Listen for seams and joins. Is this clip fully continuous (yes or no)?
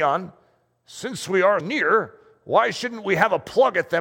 no